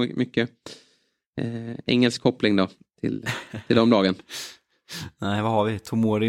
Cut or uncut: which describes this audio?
uncut